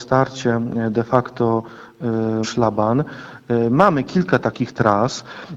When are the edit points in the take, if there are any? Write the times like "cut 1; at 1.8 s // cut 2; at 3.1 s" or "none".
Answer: cut 1; at 2.4 s // cut 2; at 4.4 s